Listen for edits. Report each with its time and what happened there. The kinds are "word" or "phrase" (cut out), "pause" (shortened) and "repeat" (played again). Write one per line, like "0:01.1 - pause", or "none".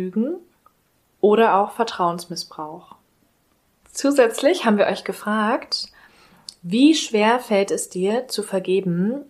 none

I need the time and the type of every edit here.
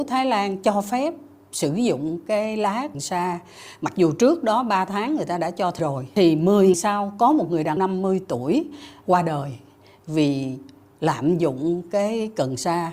0:02.9 - word
0:05.8 - word
0:06.7 - word
0:07.8 - word

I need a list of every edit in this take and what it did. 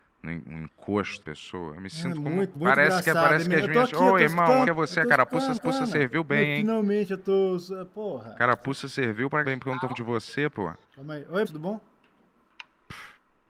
0:01.2 - word
0:02.5 - word
0:04.7 - phrase
0:05.6 - repeat
0:09.4 - word
0:09.9 - word
0:10.8 - pause
0:11.4 - word

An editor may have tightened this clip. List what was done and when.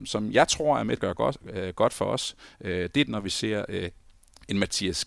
0:01.0 - word
0:03.1 - word

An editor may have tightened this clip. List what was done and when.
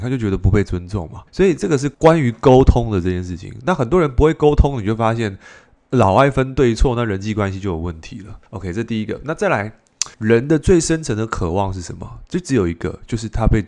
0:01.3 - pause
0:01.9 - pause
0:08.5 - pause
0:10.1 - pause

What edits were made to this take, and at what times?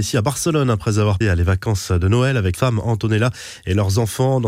0:01.2 - word
0:02.5 - word

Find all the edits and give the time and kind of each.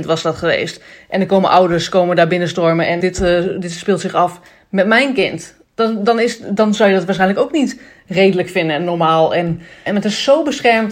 0:03.0 - word
0:05.6 - pause
0:09.9 - word

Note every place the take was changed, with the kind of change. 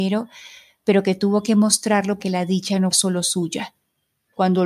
0:02.2 - word
0:02.9 - word

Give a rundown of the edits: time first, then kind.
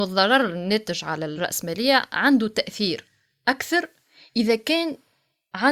none

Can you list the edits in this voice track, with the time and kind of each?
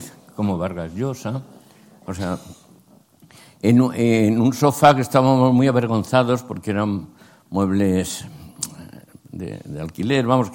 none

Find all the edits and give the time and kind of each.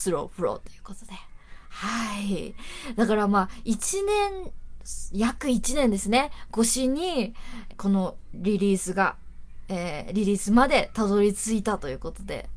0:07.7 - phrase

